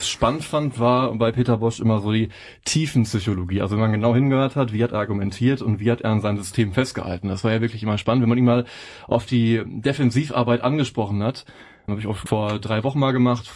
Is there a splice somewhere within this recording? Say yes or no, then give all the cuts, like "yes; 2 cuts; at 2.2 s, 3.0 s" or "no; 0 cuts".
no; 0 cuts